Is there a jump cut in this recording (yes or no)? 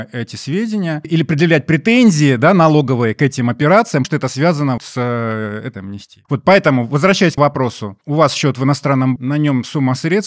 yes